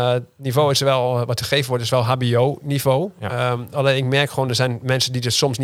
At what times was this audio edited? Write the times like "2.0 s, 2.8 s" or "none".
none